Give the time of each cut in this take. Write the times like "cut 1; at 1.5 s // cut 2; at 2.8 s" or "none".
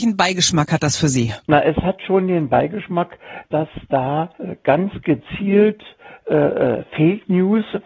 cut 1; at 1.4 s // cut 2; at 4.3 s